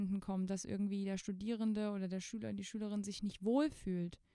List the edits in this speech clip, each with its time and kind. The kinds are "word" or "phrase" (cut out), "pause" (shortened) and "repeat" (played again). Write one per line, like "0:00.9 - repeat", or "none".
none